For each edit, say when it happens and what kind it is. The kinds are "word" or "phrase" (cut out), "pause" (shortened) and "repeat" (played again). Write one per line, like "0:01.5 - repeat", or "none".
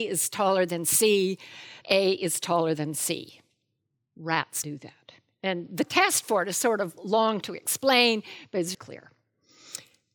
0:01.8 - word
0:04.6 - word
0:08.7 - word